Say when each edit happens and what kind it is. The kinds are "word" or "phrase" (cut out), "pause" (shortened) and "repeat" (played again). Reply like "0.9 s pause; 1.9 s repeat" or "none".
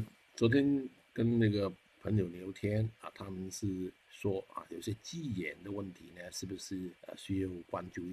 1.1 s pause; 4.0 s pause; 7.0 s pause

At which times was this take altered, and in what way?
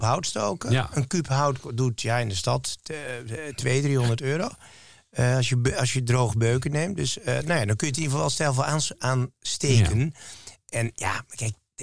none

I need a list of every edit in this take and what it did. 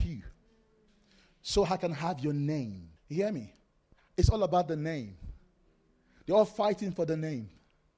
3.0 s pause; 3.8 s pause

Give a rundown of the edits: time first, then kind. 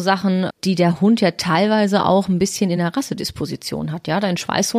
none

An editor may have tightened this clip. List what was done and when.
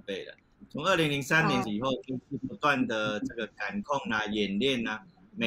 1.6 s word

